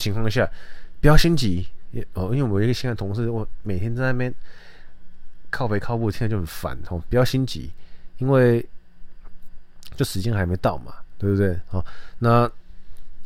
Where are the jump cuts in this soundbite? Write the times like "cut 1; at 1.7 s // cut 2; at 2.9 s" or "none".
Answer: none